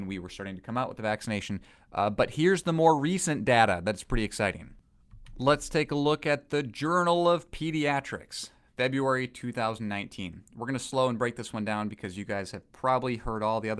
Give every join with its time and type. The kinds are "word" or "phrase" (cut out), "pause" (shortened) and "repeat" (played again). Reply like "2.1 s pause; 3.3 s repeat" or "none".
none